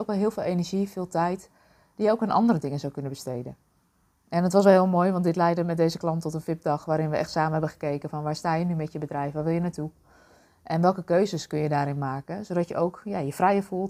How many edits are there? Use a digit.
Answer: 0